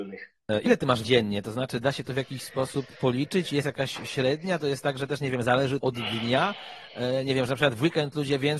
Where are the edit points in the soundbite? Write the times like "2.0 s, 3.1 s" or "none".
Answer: 1.0 s, 5.8 s